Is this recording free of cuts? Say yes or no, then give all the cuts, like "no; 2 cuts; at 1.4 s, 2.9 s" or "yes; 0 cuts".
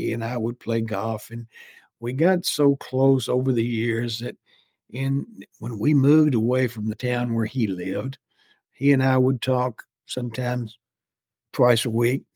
yes; 0 cuts